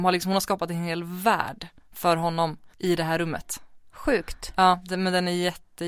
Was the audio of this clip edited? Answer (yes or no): yes